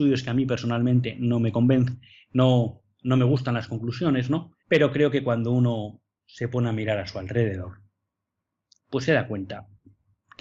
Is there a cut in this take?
yes; 1 cut; at 4.6 s

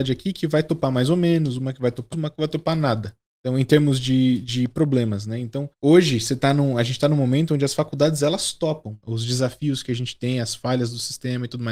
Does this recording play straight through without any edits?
no; 3 cuts; at 2.1 s, 5.7 s, 9.0 s

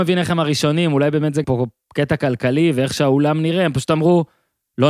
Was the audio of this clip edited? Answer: yes; 1 cut; at 1.4 s

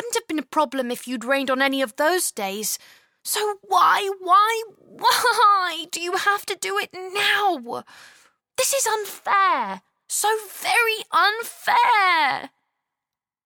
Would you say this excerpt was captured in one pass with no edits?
yes; 0 cuts

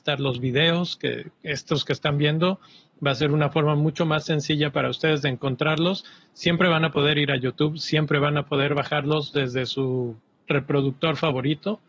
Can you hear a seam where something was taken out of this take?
no; 0 cuts

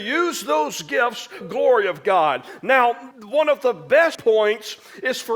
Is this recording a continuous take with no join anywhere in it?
no; 3 cuts; at 1.4 s, 3.1 s, 4.1 s

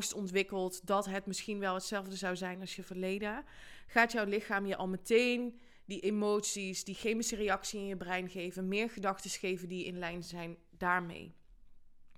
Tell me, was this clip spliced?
no; 0 cuts

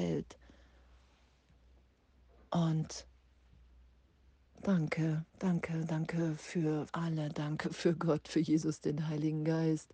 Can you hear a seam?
yes; 2 cuts; at 5.3 s, 6.9 s

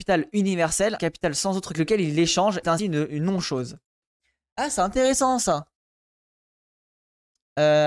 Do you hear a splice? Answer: yes; 3 cuts; at 1.0 s, 1.7 s, 2.6 s

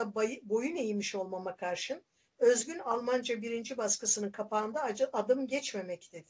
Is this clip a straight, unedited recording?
yes; 0 cuts

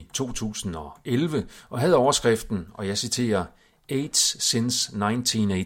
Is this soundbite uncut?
yes; 0 cuts

